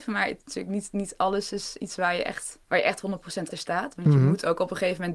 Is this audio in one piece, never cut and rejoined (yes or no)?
no